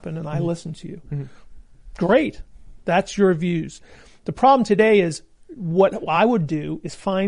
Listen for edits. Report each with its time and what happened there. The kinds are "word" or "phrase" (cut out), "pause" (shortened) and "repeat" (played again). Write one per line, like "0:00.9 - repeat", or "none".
none